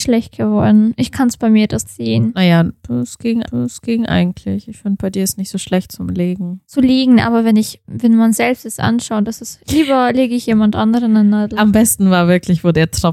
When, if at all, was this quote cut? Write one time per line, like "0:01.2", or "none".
0:01.8
0:03.4
0:09.6